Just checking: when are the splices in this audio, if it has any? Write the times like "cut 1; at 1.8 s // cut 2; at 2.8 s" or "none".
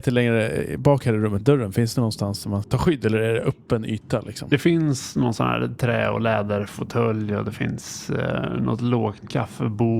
cut 1; at 1.4 s // cut 2; at 2.6 s